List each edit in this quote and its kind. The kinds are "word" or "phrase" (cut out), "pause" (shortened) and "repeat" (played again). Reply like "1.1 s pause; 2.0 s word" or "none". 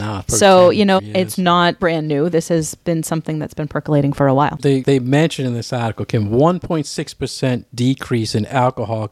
1.0 s word; 1.8 s word; 4.6 s word